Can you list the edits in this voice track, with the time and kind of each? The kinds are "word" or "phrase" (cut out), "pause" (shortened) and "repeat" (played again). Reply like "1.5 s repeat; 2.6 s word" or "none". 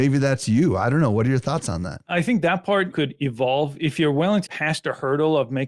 2.9 s word; 4.5 s word

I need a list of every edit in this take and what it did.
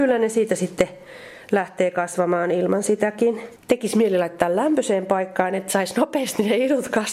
3.6 s pause

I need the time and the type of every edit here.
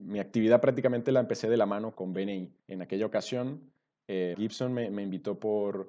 2.0 s word; 2.6 s pause; 4.3 s word

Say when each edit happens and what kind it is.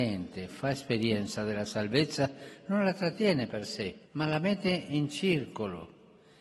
4.1 s pause

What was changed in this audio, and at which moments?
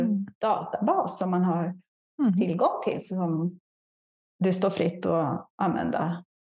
none

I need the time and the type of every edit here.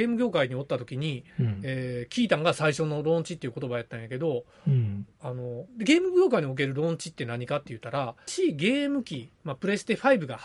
1.3 s pause; 5.7 s pause; 8.3 s phrase

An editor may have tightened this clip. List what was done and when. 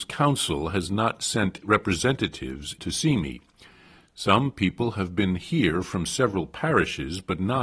1.6 s word; 2.8 s word

